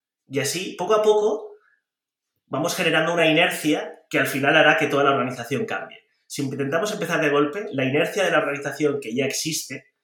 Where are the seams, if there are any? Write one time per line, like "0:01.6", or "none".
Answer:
none